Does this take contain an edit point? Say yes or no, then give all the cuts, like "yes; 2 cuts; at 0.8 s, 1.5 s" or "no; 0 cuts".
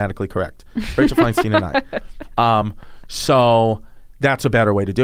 no; 0 cuts